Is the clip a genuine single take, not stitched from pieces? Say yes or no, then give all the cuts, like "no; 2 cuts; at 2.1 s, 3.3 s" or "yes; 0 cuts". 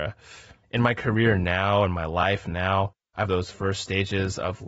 no; 1 cut; at 3.3 s